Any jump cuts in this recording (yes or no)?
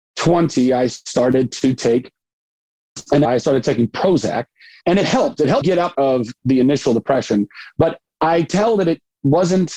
yes